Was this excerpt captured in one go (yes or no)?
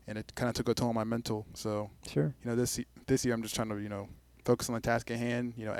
yes